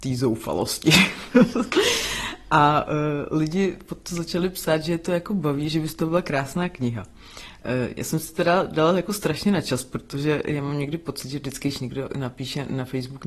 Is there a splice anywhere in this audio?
no; 0 cuts

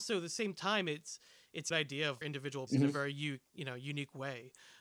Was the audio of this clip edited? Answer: yes; 3 cuts; at 1.7 s, 2.2 s, 2.7 s

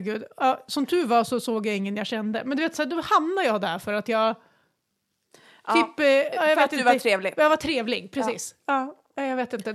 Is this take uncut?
yes; 0 cuts

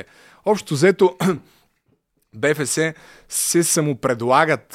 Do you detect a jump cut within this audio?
no; 0 cuts

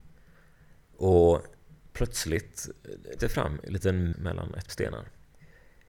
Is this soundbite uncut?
no; 4 cuts; at 3.2 s, 3.6 s, 4.1 s, 4.7 s

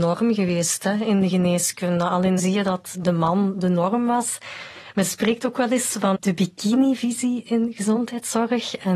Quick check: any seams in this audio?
yes; 3 cuts; at 2.4 s, 2.9 s, 6.1 s

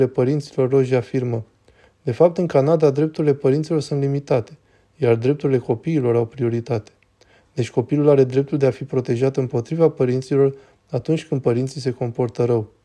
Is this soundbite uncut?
yes; 0 cuts

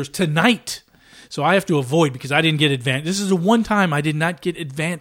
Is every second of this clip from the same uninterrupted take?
yes; 0 cuts

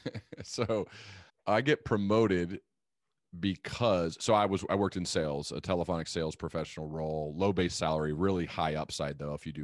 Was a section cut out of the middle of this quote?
yes; 1 cut; at 1.3 s

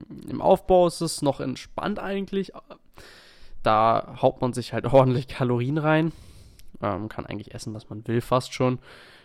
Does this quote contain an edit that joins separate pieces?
no; 0 cuts

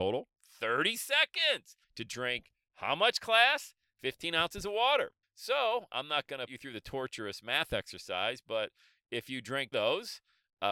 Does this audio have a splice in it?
yes; 4 cuts; at 1.8 s, 5.2 s, 6.5 s, 9.7 s

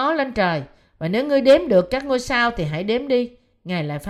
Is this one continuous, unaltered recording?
yes; 0 cuts

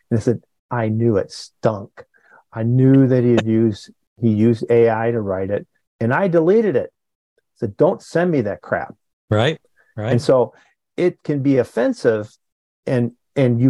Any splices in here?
no; 0 cuts

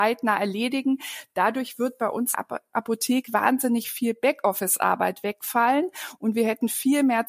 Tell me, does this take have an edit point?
yes; 2 cuts; at 2.3 s, 3.3 s

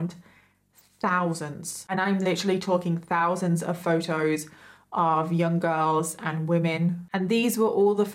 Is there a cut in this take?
no; 0 cuts

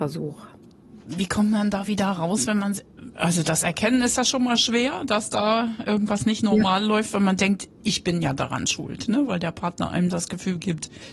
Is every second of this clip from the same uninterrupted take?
yes; 0 cuts

